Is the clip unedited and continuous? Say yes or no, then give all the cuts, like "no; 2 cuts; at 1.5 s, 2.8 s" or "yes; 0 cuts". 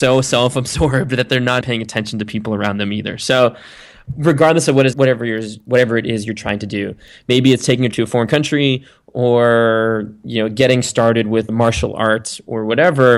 no; 4 cuts; at 1.6 s, 4.9 s, 7.9 s, 11.5 s